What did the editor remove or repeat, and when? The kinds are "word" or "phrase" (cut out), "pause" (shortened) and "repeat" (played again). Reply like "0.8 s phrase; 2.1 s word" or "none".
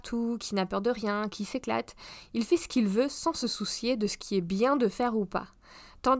none

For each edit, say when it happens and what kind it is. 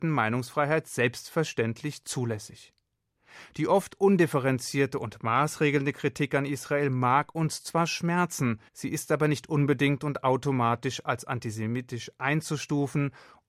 8.7 s pause

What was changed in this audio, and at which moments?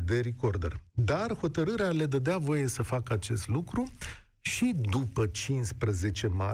none

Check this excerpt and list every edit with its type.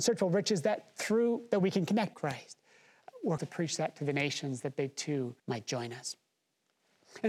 2.1 s phrase; 3.4 s word; 5.4 s pause

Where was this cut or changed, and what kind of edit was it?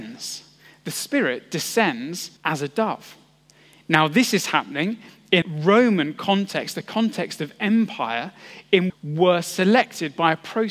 2.4 s pause; 5.4 s word; 8.9 s phrase

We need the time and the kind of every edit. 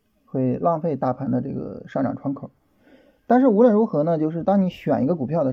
none

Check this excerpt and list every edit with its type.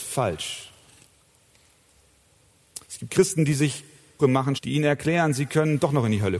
2.8 s pause; 4.2 s phrase; 4.6 s phrase

